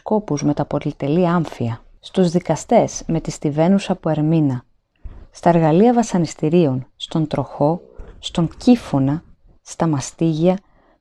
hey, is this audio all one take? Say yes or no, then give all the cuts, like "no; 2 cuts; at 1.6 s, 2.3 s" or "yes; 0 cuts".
yes; 0 cuts